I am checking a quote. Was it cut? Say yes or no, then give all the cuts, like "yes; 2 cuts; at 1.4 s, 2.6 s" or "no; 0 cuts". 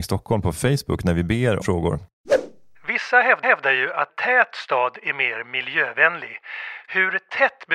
yes; 3 cuts; at 1.6 s, 3.4 s, 4.1 s